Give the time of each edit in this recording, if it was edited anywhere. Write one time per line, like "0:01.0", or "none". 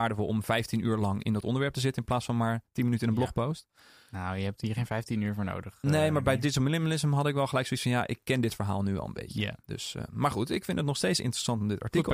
none